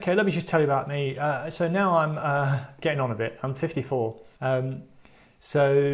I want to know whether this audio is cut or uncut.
cut